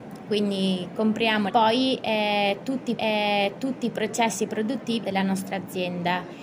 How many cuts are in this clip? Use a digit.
3